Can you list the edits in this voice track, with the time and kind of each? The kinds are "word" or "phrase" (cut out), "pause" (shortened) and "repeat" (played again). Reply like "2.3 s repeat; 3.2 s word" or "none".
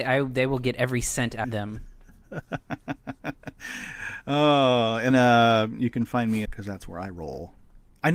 1.4 s word; 5.1 s word; 6.5 s phrase

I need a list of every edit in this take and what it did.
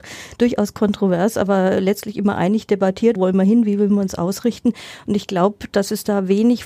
3.2 s word

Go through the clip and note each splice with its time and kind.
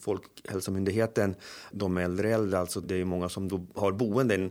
1.7 s word; 2.8 s word

